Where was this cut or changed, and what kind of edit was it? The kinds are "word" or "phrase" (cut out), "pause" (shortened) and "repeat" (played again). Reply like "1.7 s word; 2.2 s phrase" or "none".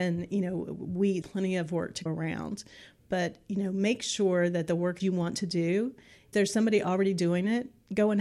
1.2 s word; 2.1 s word; 5.0 s word; 6.3 s word

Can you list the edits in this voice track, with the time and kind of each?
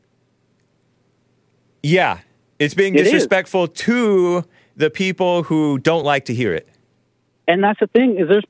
none

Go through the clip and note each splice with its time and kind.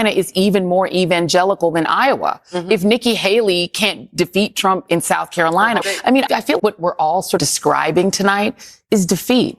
5.8 s word; 6.3 s word; 6.6 s word; 7.4 s word

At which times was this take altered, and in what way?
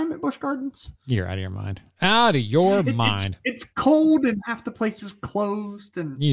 1.0 s pause

